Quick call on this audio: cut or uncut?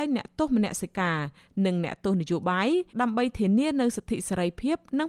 cut